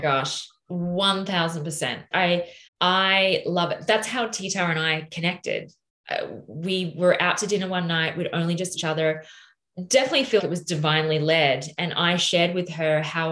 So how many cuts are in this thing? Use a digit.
4